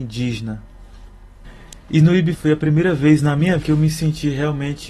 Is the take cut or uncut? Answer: cut